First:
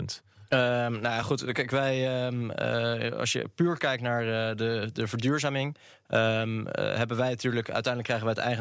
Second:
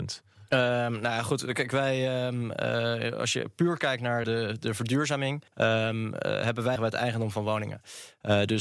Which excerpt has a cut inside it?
second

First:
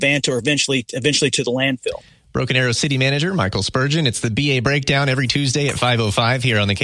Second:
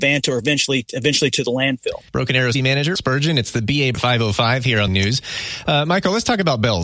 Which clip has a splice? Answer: second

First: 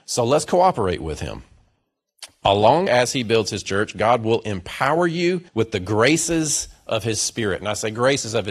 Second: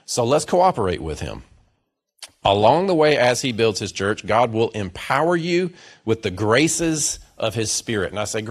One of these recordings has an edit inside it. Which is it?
first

